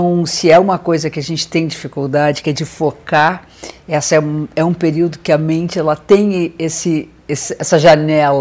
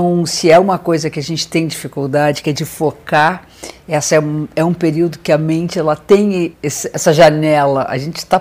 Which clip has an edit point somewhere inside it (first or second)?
second